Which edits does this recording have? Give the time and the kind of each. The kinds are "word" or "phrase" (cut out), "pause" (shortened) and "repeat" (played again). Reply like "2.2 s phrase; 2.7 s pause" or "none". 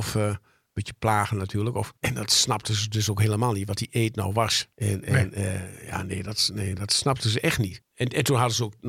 2.0 s pause; 4.7 s pause